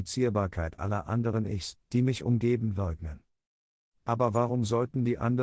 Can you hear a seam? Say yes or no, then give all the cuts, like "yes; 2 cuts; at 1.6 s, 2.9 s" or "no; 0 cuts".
no; 0 cuts